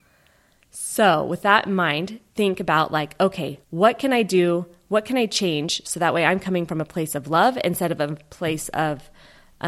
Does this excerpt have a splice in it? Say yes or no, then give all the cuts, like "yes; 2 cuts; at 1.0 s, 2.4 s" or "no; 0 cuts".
yes; 2 cuts; at 2.3 s, 3.6 s